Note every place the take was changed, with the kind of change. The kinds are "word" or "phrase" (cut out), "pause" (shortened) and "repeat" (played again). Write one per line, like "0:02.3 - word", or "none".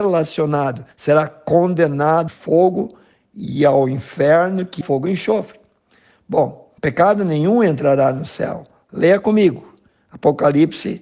0:00.9 - pause
0:02.3 - phrase
0:04.8 - phrase
0:06.8 - pause